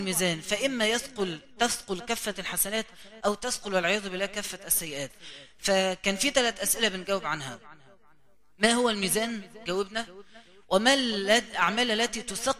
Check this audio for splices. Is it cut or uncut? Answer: uncut